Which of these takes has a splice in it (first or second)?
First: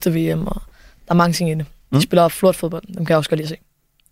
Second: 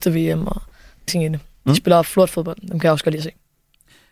second